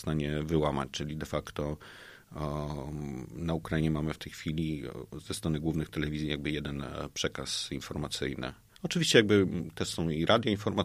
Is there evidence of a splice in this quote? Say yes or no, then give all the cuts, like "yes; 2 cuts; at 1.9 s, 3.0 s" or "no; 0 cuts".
no; 0 cuts